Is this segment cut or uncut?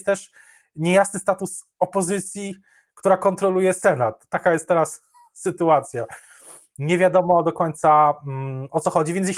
uncut